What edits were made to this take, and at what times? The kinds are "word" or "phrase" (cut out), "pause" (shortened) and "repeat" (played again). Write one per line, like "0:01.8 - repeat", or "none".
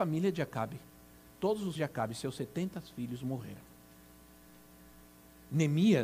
0:01.8 - word